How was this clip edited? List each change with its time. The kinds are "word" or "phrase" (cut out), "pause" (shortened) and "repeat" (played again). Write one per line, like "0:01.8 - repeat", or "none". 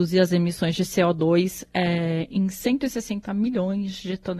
none